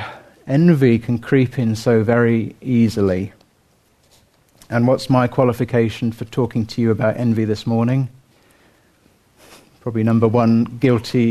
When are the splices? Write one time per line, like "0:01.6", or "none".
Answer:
none